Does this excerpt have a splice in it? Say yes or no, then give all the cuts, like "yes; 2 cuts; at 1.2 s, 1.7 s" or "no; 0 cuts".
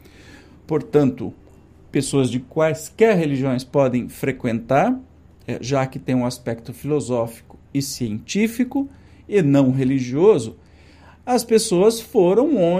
no; 0 cuts